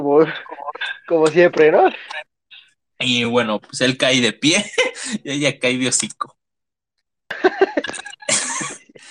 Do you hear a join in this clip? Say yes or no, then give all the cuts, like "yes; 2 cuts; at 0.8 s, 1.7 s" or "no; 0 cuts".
no; 0 cuts